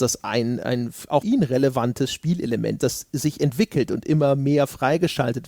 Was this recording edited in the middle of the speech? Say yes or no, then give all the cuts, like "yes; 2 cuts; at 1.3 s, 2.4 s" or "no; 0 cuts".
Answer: yes; 2 cuts; at 1.2 s, 2.8 s